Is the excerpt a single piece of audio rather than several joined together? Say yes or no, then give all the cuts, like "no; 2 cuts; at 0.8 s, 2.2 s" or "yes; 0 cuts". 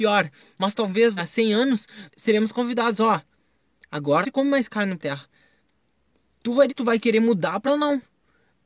no; 6 cuts; at 1.2 s, 2.1 s, 4.2 s, 5.0 s, 6.7 s, 7.7 s